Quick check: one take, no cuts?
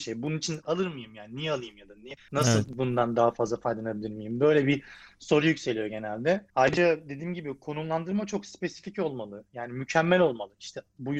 yes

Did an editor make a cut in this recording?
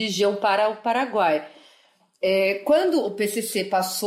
no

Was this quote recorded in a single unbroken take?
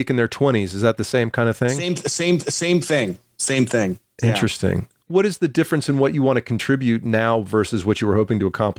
no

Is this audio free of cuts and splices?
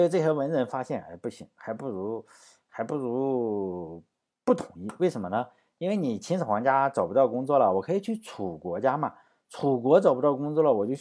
yes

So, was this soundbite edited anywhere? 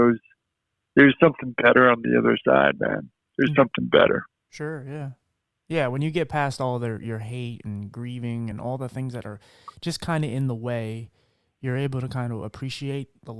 no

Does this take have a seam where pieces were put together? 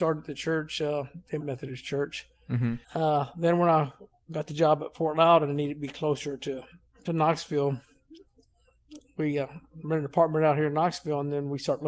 yes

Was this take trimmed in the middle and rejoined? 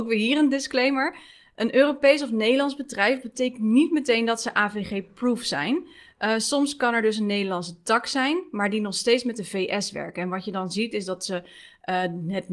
no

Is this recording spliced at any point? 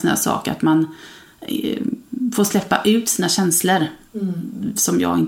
no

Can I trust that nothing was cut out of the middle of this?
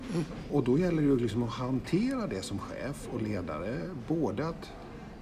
yes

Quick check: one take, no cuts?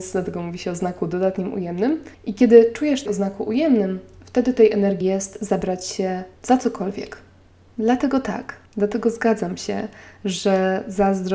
no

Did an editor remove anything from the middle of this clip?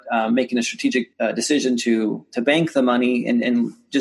yes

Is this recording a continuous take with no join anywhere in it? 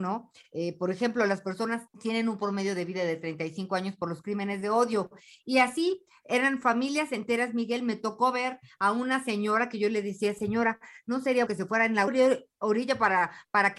no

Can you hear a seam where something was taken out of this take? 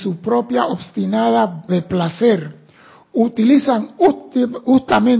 yes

